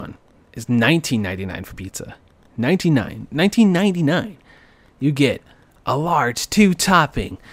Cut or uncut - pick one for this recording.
uncut